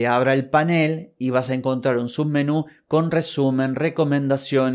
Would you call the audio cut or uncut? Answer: uncut